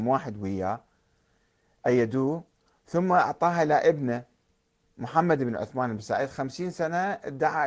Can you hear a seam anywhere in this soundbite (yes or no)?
no